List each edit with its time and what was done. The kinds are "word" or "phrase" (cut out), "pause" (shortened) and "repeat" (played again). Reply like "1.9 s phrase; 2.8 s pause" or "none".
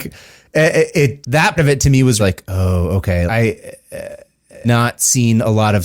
1.2 s word; 1.6 s word; 2.2 s word; 3.3 s word; 4.6 s word